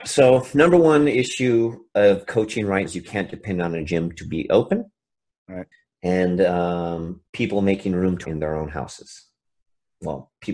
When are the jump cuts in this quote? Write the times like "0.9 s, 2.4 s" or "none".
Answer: 2.9 s, 5.7 s, 7.3 s, 8.2 s